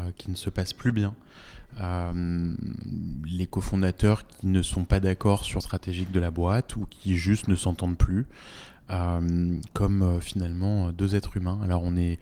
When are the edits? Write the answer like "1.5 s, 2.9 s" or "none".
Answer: 5.6 s